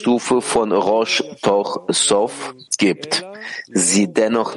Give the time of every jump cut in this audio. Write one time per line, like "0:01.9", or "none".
0:02.7